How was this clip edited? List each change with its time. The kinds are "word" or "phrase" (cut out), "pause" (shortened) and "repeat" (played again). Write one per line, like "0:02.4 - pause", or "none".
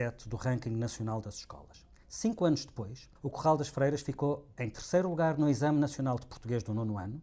0:03.2 - pause